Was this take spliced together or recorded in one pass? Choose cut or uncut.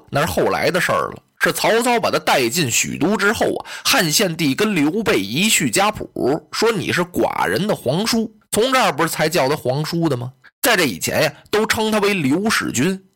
uncut